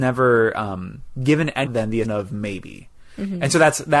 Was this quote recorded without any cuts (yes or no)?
no